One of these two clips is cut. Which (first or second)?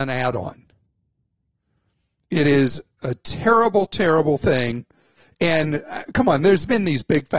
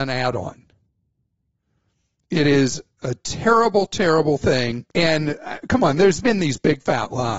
second